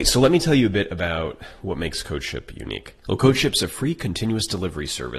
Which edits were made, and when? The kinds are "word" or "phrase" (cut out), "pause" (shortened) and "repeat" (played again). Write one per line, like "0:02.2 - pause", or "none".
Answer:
0:03.0 - pause